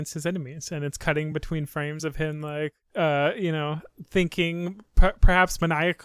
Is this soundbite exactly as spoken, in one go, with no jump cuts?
yes; 0 cuts

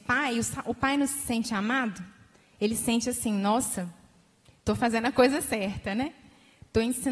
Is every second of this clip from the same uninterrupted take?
yes; 0 cuts

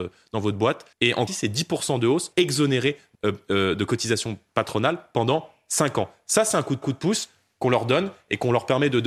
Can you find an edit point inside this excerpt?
yes; 5 cuts; at 0.9 s, 1.3 s, 2.3 s, 3.1 s, 6.8 s

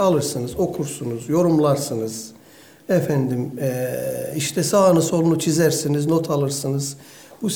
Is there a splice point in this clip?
no; 0 cuts

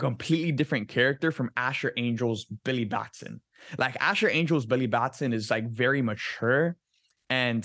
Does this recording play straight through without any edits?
yes; 0 cuts

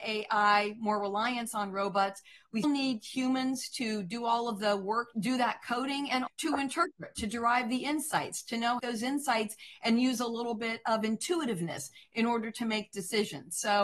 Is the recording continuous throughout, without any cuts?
no; 4 cuts; at 2.6 s, 5.1 s, 6.3 s, 8.8 s

